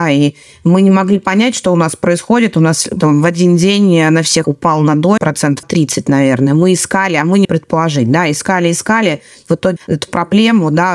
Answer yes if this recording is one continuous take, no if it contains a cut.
no